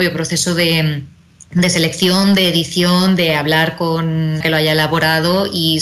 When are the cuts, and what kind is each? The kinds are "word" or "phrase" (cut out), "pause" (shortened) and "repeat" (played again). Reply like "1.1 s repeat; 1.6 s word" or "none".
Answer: 4.4 s phrase